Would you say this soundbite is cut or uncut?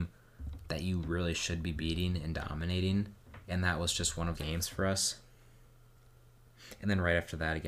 cut